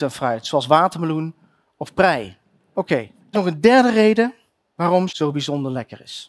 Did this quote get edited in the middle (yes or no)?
yes